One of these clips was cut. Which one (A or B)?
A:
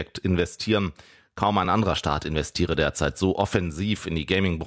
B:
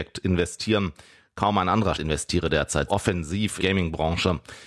B